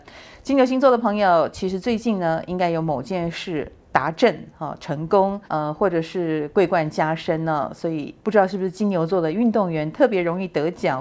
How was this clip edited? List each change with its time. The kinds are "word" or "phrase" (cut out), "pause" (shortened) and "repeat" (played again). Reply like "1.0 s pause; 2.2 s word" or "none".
5.5 s pause; 8.2 s pause